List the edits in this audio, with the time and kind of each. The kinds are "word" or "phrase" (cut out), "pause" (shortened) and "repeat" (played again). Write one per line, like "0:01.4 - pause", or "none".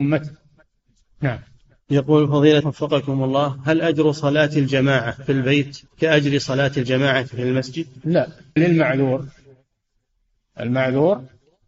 0:02.6 - word
0:05.9 - pause
0:08.6 - word